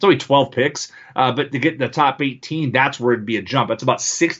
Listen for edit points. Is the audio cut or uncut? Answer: uncut